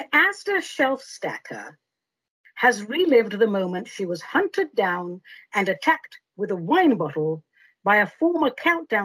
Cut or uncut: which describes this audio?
uncut